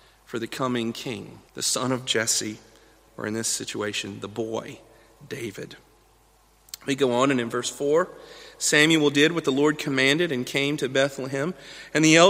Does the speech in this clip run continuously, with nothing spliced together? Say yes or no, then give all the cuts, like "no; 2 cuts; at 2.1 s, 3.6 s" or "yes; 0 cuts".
no; 2 cuts; at 1.5 s, 3.1 s